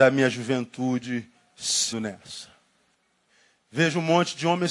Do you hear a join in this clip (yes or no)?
yes